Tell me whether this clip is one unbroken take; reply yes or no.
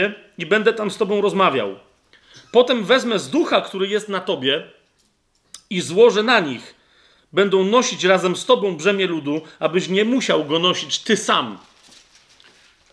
yes